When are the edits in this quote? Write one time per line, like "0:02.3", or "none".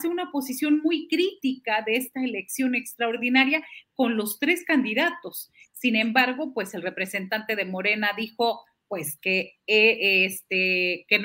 none